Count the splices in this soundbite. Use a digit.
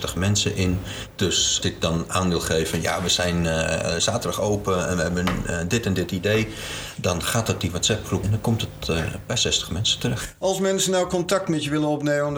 2